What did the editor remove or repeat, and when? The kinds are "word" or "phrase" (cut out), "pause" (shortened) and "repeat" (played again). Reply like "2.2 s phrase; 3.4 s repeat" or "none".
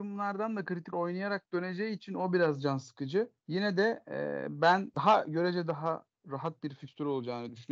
0.9 s word; 3.4 s pause; 4.9 s word